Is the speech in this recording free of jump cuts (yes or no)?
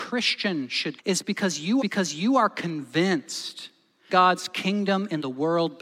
no